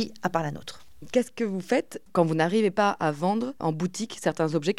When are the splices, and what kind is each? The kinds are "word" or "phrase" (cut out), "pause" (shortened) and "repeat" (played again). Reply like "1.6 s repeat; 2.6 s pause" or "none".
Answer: 3.6 s word

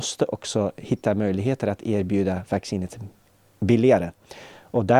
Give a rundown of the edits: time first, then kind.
none

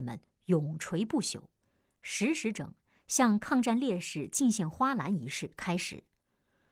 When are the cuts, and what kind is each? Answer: none

